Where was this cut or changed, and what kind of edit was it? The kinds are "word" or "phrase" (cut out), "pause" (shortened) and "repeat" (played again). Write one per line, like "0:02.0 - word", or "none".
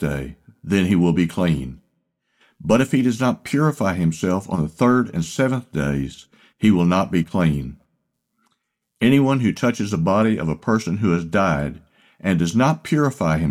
none